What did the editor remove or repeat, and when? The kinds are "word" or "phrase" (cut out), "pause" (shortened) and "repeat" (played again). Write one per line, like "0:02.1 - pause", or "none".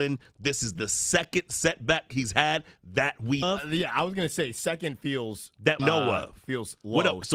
0:03.4 - word
0:05.8 - word